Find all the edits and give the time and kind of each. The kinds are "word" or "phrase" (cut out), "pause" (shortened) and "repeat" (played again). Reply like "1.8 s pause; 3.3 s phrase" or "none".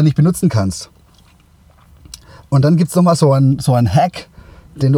none